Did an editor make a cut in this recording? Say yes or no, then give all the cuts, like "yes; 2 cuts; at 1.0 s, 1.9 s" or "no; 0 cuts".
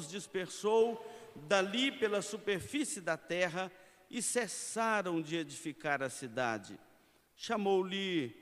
no; 0 cuts